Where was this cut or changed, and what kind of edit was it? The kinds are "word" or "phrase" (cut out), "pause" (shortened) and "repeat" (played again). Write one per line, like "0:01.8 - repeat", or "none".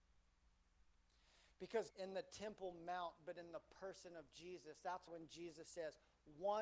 0:01.9 - phrase
0:05.1 - word